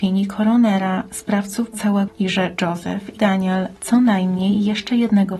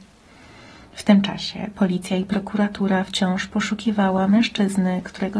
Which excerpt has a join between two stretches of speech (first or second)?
first